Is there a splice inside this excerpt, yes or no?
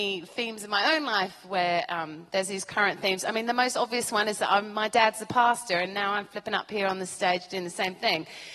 no